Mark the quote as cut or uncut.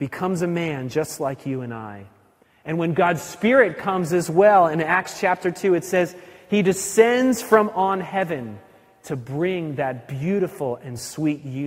uncut